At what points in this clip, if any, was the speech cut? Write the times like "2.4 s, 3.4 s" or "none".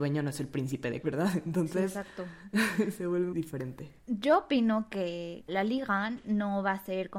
1.0 s, 3.3 s, 4.0 s, 5.5 s